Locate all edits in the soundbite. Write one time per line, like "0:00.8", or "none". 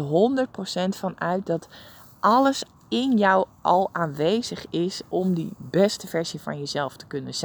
none